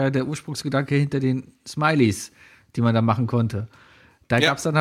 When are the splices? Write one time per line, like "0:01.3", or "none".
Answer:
none